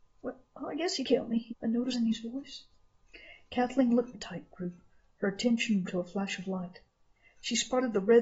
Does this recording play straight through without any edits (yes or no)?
no